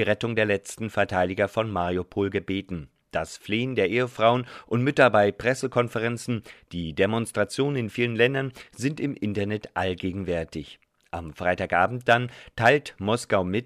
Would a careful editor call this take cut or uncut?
uncut